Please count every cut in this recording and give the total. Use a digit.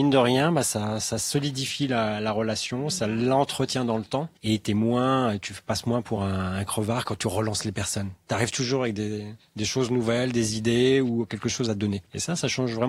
0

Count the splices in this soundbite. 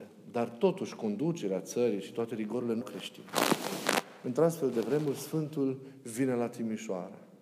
1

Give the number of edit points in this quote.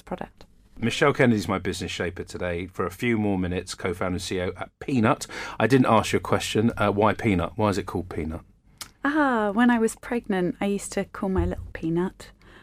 1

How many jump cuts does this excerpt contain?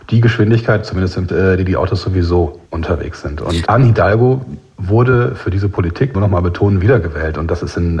4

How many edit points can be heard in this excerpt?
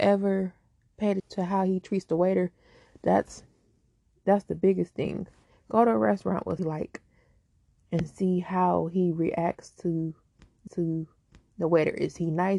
3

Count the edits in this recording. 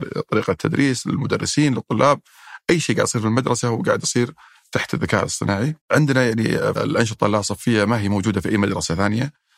2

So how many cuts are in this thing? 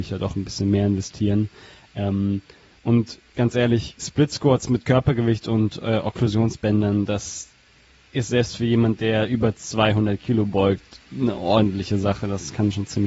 0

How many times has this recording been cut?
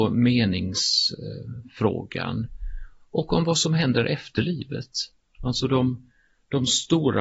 0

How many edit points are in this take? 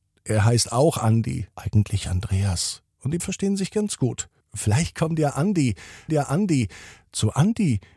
5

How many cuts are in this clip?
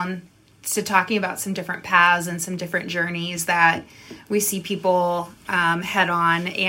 0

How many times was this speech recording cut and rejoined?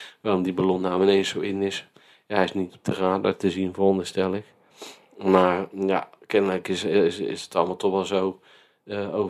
0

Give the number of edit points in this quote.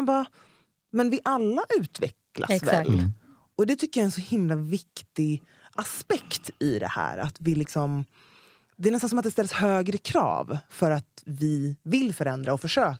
0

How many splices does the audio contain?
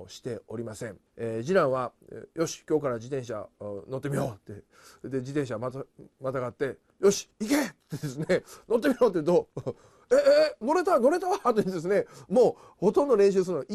3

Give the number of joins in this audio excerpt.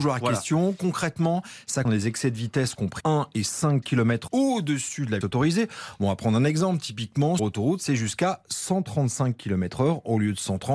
5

